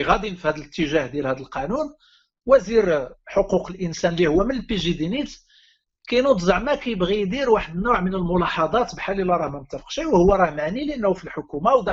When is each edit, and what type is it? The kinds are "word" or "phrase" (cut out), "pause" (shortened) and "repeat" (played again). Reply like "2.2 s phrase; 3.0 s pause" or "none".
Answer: none